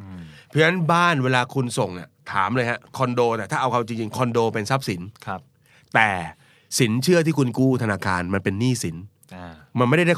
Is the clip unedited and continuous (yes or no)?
yes